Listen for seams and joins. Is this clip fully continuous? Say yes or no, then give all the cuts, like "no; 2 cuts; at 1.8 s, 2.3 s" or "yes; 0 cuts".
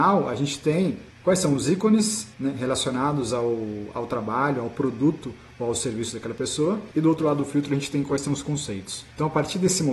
no; 2 cuts; at 1.1 s, 2.3 s